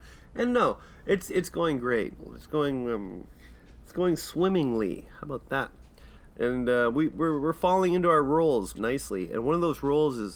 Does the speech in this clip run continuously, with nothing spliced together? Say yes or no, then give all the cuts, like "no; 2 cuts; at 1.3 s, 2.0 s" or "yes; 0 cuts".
no; 1 cut; at 8.8 s